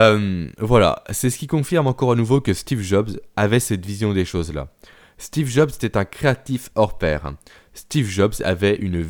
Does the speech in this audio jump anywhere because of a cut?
no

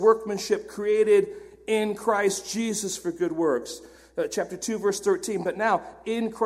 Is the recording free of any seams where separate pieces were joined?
yes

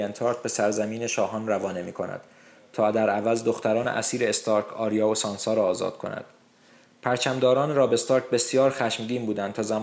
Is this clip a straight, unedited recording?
yes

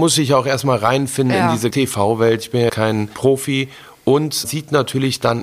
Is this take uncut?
no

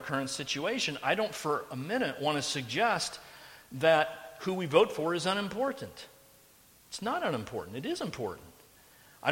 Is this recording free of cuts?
yes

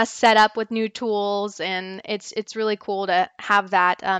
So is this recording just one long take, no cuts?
yes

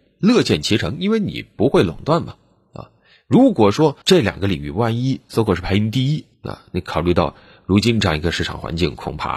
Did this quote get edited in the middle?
yes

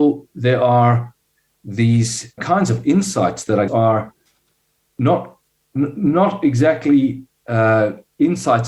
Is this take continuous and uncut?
no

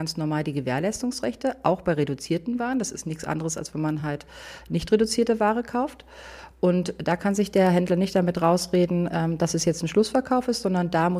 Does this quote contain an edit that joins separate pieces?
no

